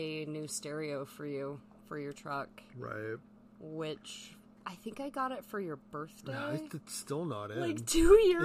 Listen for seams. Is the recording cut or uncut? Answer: uncut